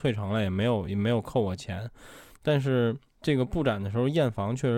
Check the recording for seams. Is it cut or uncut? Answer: cut